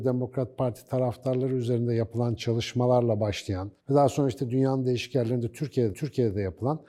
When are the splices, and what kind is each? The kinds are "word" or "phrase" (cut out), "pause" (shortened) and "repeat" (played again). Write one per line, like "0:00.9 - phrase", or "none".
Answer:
0:03.8 - pause
0:05.9 - repeat